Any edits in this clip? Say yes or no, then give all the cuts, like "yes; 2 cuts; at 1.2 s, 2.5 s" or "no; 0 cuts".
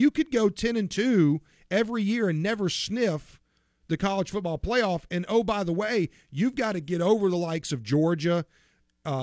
no; 0 cuts